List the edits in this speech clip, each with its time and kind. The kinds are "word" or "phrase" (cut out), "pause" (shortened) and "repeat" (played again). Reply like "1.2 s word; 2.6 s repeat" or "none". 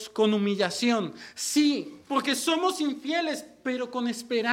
2.0 s pause